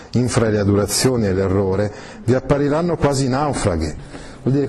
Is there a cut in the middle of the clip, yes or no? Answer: no